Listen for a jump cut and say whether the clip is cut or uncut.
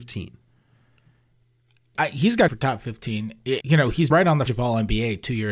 cut